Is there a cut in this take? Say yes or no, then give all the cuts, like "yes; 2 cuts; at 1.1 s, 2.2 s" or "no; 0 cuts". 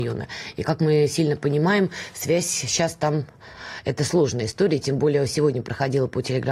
no; 0 cuts